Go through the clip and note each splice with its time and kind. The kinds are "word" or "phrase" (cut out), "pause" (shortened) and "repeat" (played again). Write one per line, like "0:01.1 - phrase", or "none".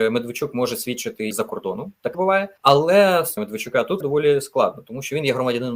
0:01.3 - word
0:02.1 - word
0:02.6 - pause
0:03.4 - phrase
0:04.0 - word

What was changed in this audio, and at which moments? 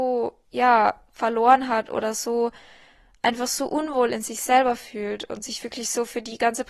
none

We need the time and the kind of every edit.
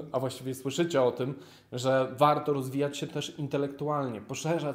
none

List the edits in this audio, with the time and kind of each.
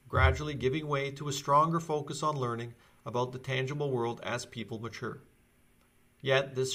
none

